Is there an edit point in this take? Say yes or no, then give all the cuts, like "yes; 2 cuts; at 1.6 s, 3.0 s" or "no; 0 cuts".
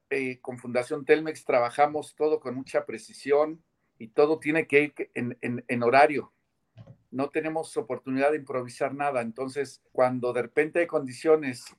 yes; 3 cuts; at 3.9 s, 5.4 s, 9.9 s